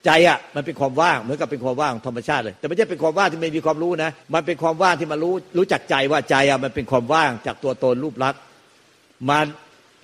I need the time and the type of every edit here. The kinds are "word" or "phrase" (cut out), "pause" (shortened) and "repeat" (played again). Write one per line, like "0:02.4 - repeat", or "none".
0:04.2 - pause